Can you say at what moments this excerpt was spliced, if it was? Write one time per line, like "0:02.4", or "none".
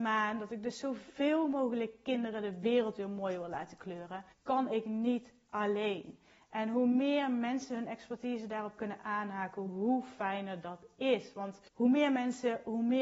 0:04.3
0:11.7